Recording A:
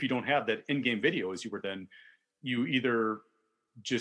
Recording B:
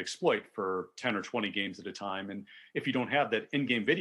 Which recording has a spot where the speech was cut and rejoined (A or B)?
A